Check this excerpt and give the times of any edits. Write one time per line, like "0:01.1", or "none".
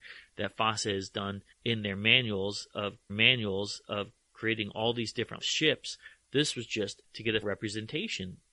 0:01.5
0:03.1
0:05.4
0:07.0
0:07.4